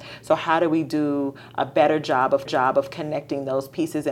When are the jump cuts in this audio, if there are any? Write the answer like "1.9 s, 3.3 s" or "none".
2.5 s